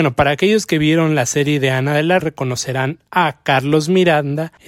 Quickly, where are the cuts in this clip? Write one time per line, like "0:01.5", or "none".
0:02.2

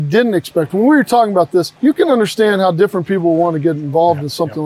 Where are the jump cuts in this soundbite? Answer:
0:01.8

